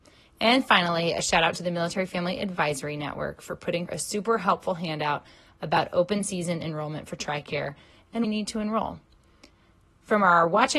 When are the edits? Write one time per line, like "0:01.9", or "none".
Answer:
0:03.9
0:08.2